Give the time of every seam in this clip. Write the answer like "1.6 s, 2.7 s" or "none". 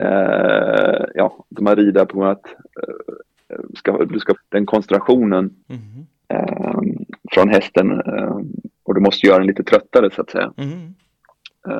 1.6 s, 3.8 s, 4.4 s, 8.7 s

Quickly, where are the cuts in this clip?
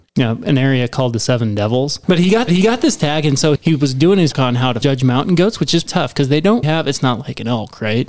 2.0 s, 2.5 s, 3.6 s, 4.3 s, 4.8 s, 5.9 s, 6.6 s

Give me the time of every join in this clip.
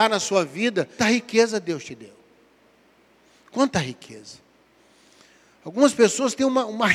1.0 s

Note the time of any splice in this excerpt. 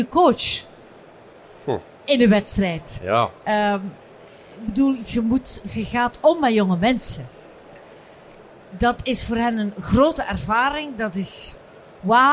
none

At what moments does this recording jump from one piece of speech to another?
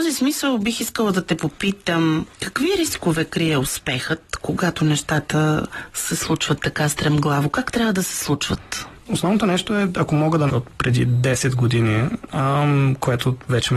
2.3 s, 10.5 s

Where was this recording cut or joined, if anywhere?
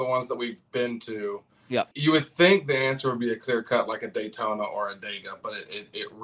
1.9 s

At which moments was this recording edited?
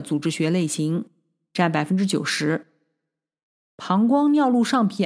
none

